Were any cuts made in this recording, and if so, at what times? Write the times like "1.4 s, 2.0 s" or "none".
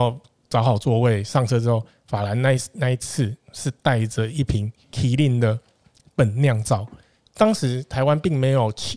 none